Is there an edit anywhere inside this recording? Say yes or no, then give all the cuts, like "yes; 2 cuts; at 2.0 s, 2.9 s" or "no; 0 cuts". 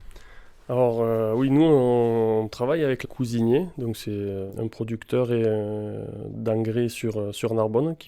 yes; 1 cut; at 3.0 s